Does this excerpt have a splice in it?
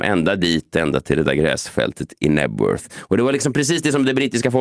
no; 0 cuts

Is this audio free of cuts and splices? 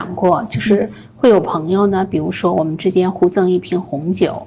yes; 0 cuts

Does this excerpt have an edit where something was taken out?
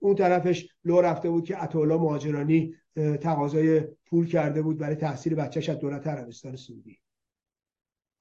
no; 0 cuts

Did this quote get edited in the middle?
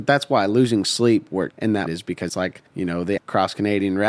yes; 5 cuts; at 1.5 s, 1.9 s, 2.3 s, 2.7 s, 3.2 s

